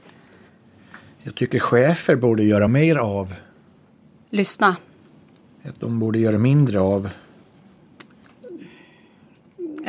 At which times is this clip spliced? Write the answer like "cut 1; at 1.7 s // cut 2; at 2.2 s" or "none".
none